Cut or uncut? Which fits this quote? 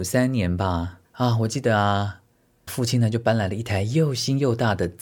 cut